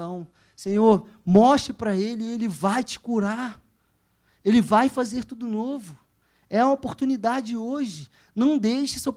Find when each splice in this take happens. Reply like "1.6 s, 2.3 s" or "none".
none